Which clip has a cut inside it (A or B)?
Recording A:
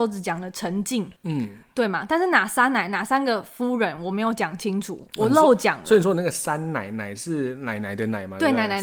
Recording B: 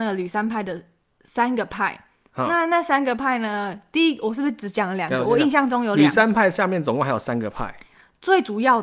A